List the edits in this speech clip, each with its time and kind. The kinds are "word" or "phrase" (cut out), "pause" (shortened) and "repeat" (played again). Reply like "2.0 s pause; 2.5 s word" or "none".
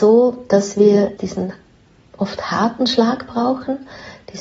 1.2 s word